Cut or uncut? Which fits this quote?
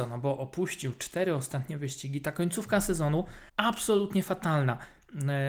cut